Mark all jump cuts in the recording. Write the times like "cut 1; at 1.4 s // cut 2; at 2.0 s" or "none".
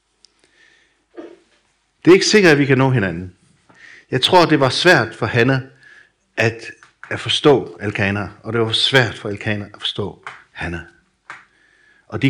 none